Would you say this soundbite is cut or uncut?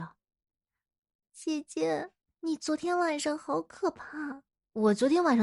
uncut